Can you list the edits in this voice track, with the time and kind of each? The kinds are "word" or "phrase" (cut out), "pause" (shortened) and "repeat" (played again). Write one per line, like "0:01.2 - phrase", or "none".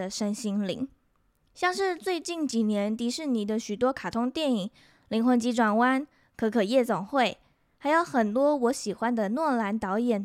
none